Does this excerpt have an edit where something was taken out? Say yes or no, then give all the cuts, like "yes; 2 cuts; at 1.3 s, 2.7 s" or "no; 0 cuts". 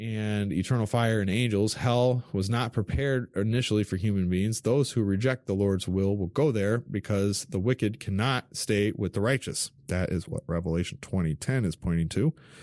yes; 1 cut; at 9.8 s